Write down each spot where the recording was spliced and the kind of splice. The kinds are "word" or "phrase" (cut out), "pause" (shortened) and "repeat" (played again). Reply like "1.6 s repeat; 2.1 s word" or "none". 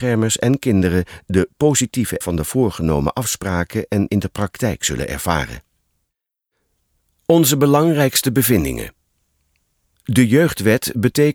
2.2 s word; 4.1 s word